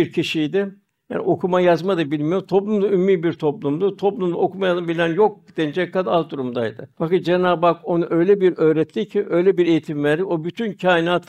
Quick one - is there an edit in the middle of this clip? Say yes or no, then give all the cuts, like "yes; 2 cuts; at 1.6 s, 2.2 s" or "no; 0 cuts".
yes; 1 cut; at 6.9 s